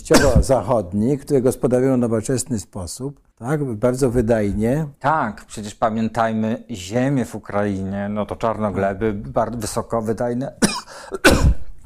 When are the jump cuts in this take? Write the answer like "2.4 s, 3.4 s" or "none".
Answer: 3.3 s, 5.0 s